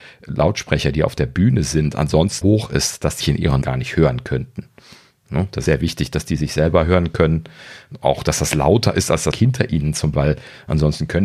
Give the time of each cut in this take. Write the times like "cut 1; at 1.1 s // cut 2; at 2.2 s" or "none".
cut 1; at 2.4 s // cut 2; at 3.2 s // cut 3; at 3.6 s // cut 4; at 5.7 s // cut 5; at 9.3 s // cut 6; at 10.1 s